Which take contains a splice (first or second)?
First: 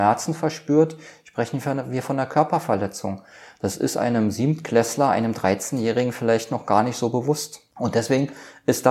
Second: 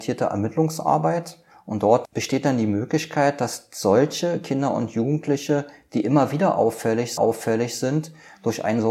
second